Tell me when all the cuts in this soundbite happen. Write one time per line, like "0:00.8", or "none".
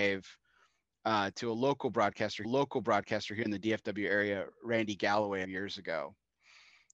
0:02.4
0:05.4